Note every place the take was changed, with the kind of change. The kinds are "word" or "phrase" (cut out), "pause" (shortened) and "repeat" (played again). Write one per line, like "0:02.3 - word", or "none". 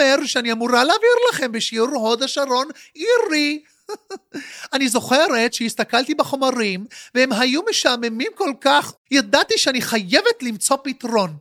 0:09.0 - pause

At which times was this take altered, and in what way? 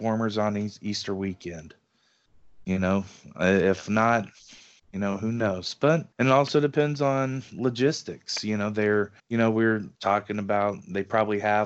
0:04.8 - pause
0:06.1 - pause
0:09.2 - pause
0:09.9 - pause

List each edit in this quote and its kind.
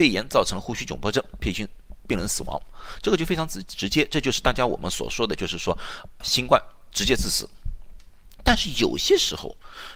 0:06.2 - word

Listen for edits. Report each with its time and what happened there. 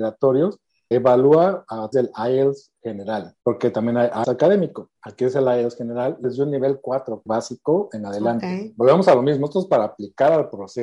0:00.9 - word
0:01.9 - word
0:03.4 - pause
0:04.2 - word
0:06.2 - word
0:07.3 - phrase

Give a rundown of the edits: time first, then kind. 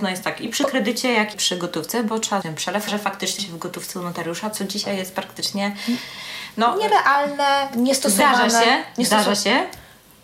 0:01.3 - word
0:02.4 - word
0:02.9 - word
0:03.4 - word

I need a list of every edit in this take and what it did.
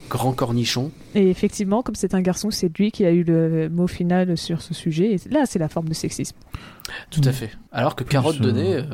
0:07.7 - pause

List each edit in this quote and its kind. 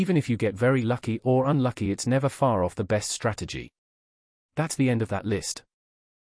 none

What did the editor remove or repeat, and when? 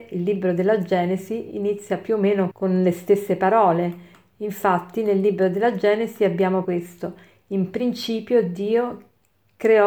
0:02.5 - word
0:06.6 - word

